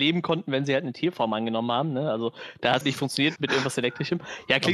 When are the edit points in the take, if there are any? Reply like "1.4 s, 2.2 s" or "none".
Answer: 2.8 s, 3.4 s